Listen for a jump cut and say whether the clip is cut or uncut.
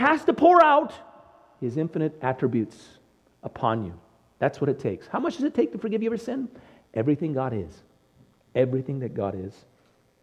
uncut